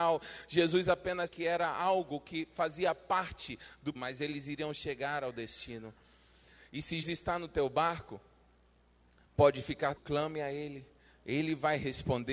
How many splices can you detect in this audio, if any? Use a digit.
4